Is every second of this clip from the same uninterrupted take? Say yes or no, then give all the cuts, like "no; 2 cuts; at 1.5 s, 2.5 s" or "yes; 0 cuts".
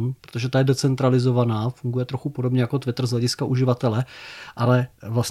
yes; 0 cuts